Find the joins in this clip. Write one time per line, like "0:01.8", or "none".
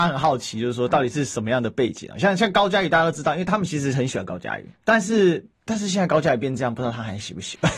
0:04.7
0:05.5